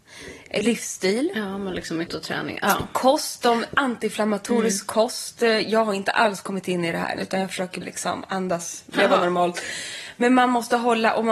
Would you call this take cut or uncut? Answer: cut